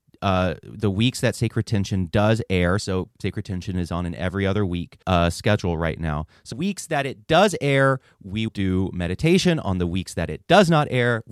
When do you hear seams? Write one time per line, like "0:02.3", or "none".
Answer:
0:05.0
0:06.5
0:08.5